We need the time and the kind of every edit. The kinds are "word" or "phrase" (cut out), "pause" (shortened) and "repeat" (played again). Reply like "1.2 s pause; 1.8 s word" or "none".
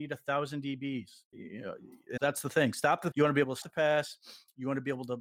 1.3 s word; 2.2 s word; 3.1 s word; 3.6 s word